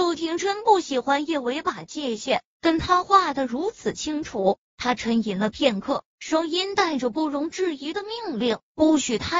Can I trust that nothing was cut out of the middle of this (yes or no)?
no